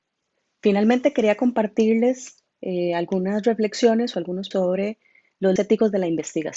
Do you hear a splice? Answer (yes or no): yes